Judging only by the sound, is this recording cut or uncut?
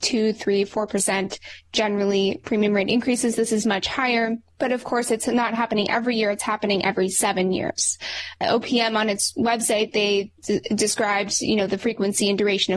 uncut